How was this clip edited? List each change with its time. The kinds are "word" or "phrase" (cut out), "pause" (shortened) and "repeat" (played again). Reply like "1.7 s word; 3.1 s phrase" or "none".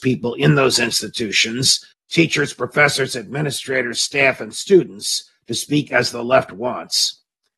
1.9 s pause